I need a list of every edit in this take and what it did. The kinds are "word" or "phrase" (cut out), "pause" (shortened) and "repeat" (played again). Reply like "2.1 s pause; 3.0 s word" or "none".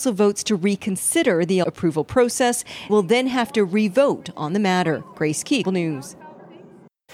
1.6 s word; 2.9 s word; 5.6 s word